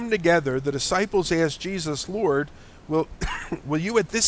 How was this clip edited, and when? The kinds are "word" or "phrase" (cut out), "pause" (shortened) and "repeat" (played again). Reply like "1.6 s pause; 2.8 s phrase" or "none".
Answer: none